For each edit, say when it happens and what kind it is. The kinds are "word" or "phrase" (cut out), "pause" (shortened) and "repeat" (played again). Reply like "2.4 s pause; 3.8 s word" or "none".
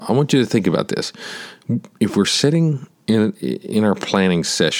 none